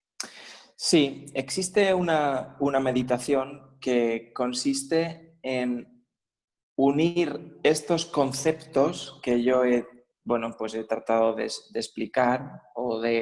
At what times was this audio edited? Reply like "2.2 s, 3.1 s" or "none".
none